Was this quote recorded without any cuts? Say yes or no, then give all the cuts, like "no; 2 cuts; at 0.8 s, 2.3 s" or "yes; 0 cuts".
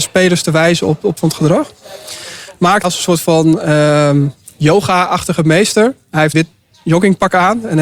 no; 3 cuts; at 1.2 s, 2.8 s, 6.3 s